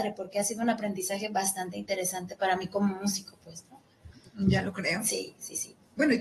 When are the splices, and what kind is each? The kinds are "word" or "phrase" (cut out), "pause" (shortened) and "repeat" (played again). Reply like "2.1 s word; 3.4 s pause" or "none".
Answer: none